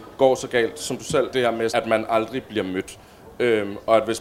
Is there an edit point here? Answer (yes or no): yes